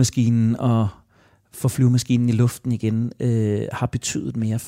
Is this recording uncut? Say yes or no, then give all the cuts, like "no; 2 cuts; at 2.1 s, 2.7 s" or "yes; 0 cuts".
yes; 0 cuts